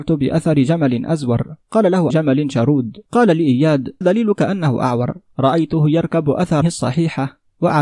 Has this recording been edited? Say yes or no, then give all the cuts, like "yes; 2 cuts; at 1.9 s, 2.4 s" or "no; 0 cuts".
yes; 6 cuts; at 1.6 s, 2.1 s, 3.1 s, 4.0 s, 5.3 s, 6.6 s